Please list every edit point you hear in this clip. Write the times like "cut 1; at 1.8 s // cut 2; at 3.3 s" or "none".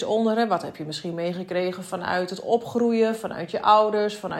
none